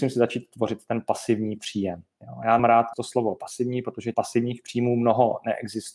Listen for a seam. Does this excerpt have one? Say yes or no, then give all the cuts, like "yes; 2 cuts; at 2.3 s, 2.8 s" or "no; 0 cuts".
yes; 3 cuts; at 2.6 s, 2.9 s, 4.1 s